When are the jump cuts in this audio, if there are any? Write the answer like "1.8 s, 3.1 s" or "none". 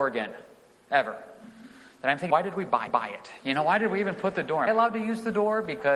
2.3 s, 2.9 s, 4.7 s